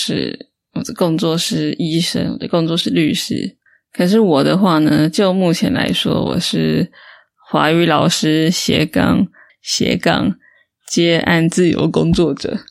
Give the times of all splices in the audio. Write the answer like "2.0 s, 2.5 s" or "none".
9.5 s